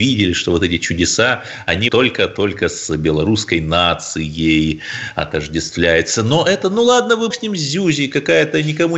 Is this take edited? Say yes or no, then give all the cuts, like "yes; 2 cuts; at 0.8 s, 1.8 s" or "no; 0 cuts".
yes; 2 cuts; at 1.9 s, 7.3 s